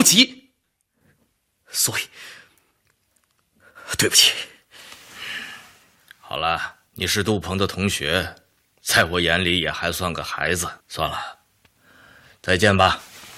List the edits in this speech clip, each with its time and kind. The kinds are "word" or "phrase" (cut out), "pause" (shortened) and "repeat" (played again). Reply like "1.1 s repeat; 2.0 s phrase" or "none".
6.9 s pause; 10.8 s pause